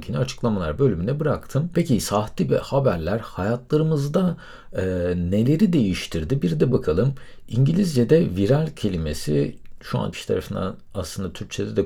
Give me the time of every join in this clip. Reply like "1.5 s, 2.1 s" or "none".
2.5 s, 6.7 s, 10.1 s

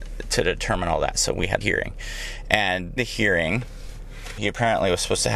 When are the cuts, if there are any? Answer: 1.6 s, 3.0 s, 4.4 s

